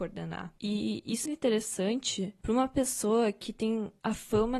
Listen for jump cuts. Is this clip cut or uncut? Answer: cut